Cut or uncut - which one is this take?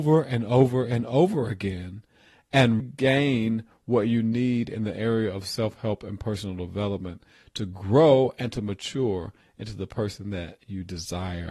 cut